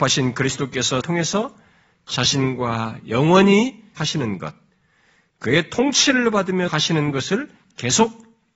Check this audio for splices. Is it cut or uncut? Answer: cut